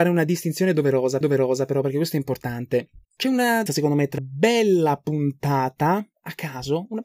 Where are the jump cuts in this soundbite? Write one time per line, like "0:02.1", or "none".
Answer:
0:01.2
0:03.0
0:03.7
0:04.2